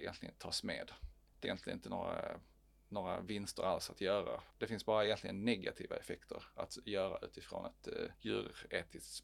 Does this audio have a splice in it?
yes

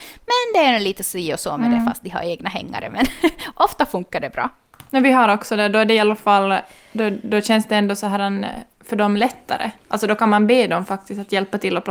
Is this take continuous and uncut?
yes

